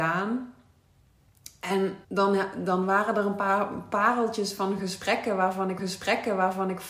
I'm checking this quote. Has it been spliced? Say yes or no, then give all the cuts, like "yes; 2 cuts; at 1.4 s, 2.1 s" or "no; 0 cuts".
yes; 2 cuts; at 2.0 s, 5.8 s